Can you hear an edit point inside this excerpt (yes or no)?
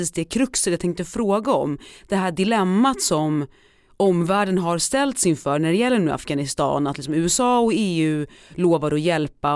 no